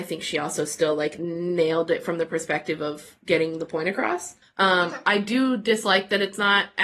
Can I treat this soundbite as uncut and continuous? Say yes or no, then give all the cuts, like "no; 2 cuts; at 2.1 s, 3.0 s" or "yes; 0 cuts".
no; 1 cut; at 4.4 s